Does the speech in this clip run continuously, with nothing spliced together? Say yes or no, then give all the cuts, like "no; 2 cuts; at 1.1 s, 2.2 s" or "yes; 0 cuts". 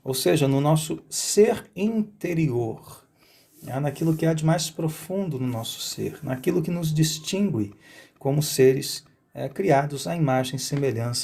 yes; 0 cuts